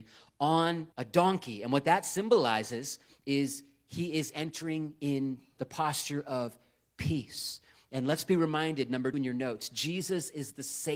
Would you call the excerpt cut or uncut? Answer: cut